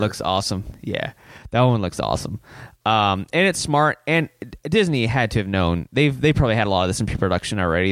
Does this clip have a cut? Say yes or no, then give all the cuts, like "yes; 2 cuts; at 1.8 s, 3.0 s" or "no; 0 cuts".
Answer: no; 0 cuts